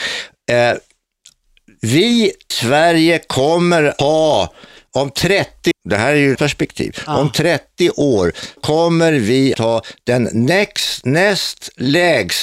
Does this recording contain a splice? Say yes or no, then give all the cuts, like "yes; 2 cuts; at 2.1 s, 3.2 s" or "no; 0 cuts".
yes; 6 cuts; at 2.5 s, 4.0 s, 5.7 s, 6.4 s, 8.6 s, 9.5 s